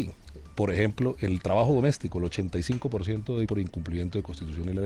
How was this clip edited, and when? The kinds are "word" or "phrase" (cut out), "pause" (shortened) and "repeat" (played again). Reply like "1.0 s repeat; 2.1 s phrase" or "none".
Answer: 3.5 s word